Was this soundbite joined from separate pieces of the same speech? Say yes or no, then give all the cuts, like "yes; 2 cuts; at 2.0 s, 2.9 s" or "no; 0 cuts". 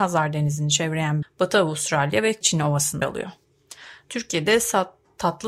yes; 3 cuts; at 1.2 s, 2.4 s, 3.0 s